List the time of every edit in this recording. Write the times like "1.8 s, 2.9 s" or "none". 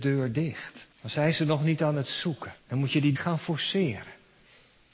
0.9 s, 2.6 s, 3.1 s